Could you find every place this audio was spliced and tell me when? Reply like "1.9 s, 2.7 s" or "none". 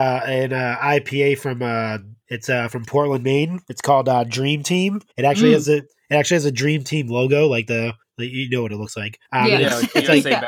2.2 s, 5.1 s, 8.0 s, 9.2 s